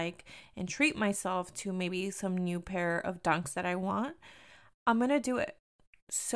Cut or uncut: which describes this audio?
uncut